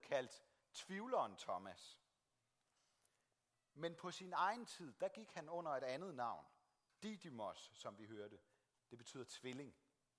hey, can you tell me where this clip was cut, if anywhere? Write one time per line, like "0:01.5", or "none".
none